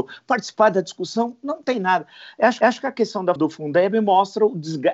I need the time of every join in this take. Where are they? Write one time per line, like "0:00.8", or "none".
0:02.6
0:03.4